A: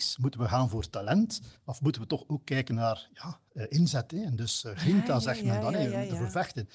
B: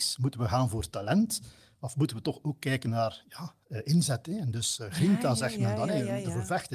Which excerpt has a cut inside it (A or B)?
A